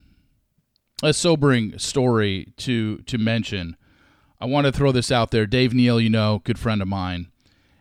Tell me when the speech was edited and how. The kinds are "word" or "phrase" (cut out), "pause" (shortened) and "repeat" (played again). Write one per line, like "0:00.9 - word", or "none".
none